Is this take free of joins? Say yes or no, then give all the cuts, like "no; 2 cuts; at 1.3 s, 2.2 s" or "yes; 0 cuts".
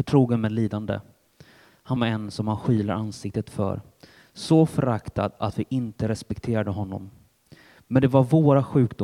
no; 1 cut; at 2.0 s